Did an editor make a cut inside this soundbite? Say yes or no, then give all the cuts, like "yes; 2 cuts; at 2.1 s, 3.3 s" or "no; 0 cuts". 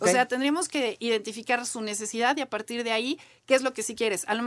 no; 0 cuts